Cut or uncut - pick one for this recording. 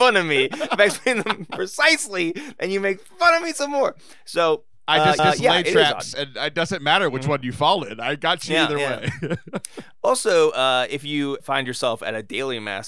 cut